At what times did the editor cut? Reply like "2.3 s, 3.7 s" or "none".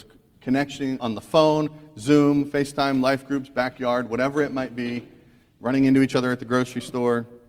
1.0 s